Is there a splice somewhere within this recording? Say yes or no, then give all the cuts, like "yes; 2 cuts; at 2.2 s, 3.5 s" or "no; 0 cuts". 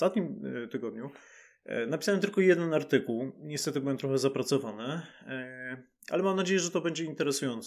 no; 0 cuts